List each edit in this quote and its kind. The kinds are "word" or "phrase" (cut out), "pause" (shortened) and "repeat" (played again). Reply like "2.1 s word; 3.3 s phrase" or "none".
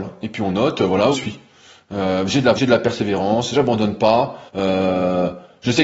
1.1 s phrase; 2.6 s word; 4.5 s pause